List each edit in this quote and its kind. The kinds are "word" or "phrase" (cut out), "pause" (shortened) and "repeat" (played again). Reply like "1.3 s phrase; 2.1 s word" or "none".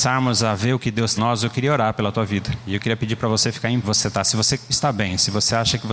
1.2 s phrase; 3.8 s phrase; 4.7 s word

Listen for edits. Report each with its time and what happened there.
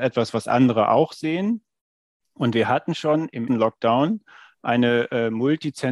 3.5 s word

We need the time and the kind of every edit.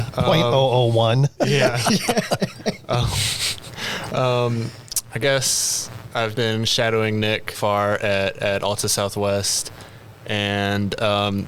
6.3 s word; 7.5 s word

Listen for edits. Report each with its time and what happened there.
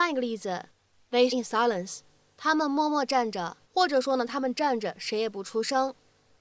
1.3 s word; 3.6 s pause

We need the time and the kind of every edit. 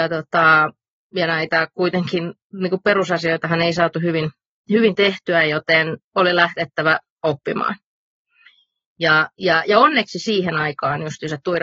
none

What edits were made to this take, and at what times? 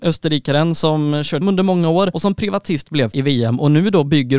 1.4 s word; 2.1 s word; 3.1 s word

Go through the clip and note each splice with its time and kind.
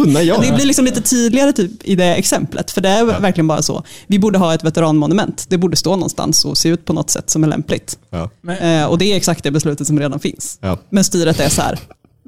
none

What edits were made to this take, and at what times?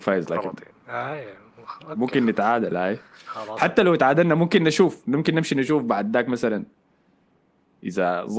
none

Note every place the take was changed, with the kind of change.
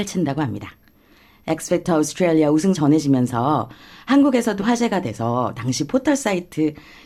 2.7 s word; 4.6 s word

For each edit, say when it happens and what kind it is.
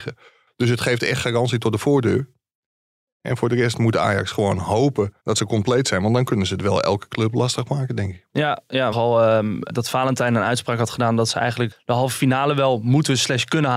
5.2 s pause; 8.9 s phrase; 9.7 s word; 11.7 s word

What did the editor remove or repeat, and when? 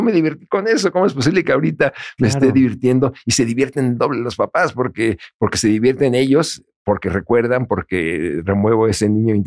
none

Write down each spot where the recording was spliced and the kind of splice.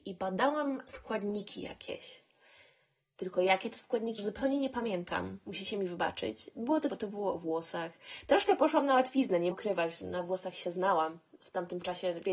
4.2 s word; 6.9 s word; 9.5 s word

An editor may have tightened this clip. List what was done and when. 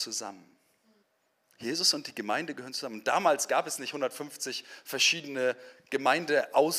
1.0 s pause

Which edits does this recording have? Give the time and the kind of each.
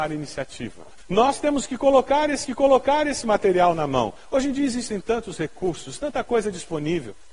2.4 s repeat

